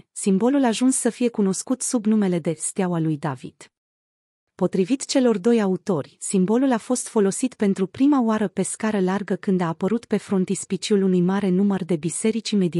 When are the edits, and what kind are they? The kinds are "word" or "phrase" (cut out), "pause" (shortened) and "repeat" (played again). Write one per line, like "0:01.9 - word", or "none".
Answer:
none